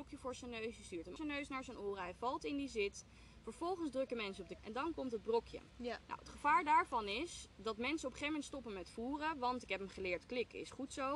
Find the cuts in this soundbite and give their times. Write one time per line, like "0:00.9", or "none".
0:01.2
0:04.6